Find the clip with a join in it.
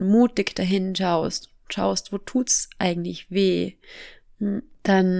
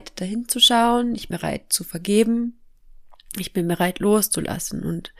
second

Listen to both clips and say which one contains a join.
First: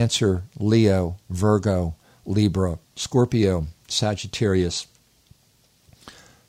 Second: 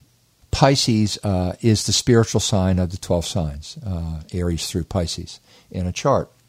first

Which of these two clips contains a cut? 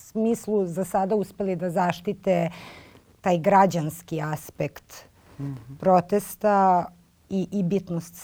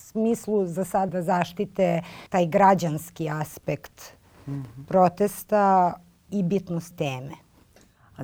second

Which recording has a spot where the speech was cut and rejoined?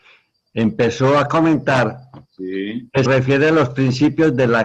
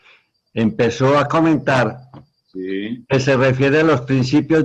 first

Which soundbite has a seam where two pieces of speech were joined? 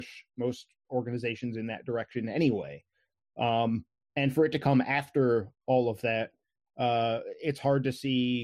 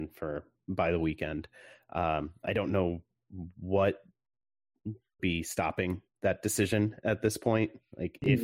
second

